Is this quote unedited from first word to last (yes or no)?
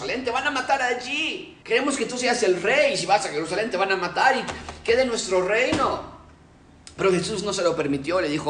no